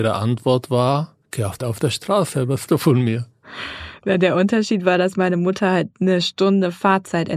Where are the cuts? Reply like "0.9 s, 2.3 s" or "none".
1.2 s, 1.6 s, 2.7 s